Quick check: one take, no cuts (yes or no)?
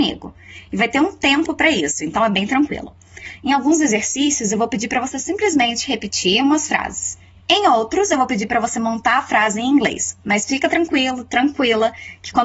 yes